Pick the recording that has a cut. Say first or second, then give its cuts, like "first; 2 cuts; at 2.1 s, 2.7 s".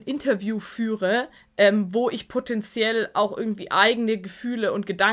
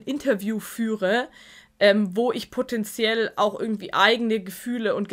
first; 1 cut; at 1.4 s